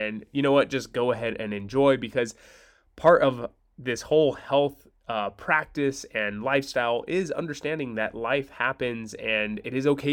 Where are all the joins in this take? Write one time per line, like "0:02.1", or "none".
none